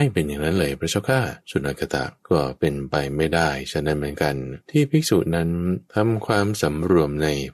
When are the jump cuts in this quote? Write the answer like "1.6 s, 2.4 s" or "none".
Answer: 1.4 s, 2.2 s, 4.6 s, 5.9 s